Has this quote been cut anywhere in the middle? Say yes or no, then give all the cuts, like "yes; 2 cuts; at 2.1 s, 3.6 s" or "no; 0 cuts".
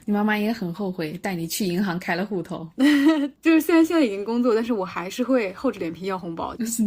yes; 1 cut; at 3.3 s